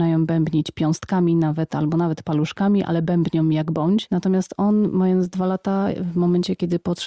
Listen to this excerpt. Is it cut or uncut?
uncut